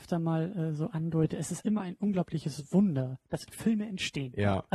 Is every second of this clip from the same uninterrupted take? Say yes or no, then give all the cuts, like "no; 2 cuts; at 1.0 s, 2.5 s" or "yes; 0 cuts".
no; 2 cuts; at 1.6 s, 3.5 s